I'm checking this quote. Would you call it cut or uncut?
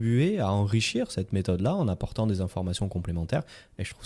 uncut